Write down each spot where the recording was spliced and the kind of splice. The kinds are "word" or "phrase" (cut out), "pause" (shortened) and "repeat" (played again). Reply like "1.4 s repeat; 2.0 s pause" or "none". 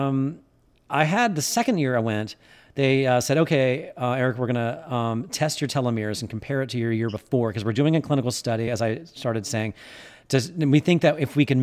none